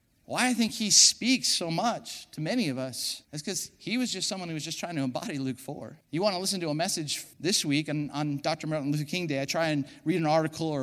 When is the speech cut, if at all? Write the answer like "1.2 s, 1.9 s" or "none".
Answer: 3.2 s, 6.0 s, 7.3 s

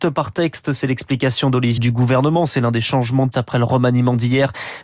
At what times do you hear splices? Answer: 1.8 s, 3.3 s

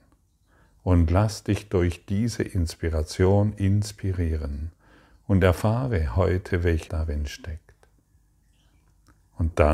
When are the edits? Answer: 6.9 s

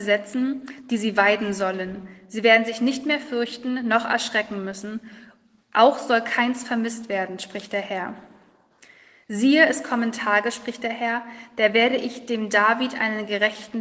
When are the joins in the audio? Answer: none

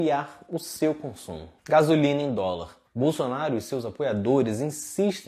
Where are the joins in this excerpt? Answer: 1.6 s, 2.9 s

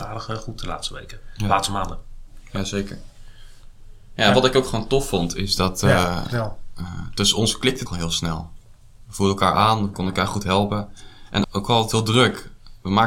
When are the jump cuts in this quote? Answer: 7.9 s, 9.9 s, 11.4 s

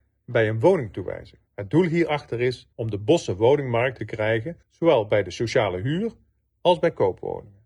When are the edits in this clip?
1.5 s, 2.7 s, 4.0 s, 4.6 s

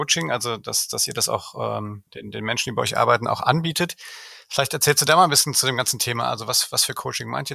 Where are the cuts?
2.1 s

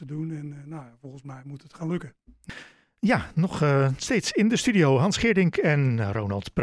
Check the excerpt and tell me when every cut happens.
none

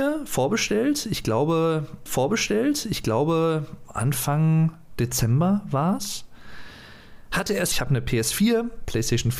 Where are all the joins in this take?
2.1 s, 7.7 s

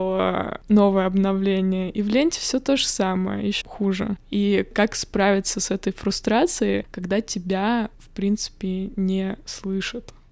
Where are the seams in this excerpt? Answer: 3.6 s, 7.9 s

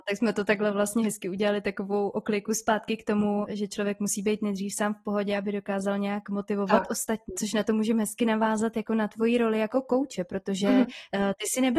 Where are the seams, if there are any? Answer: 3.4 s, 7.3 s

